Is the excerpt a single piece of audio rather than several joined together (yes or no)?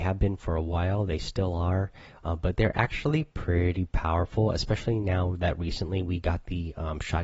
yes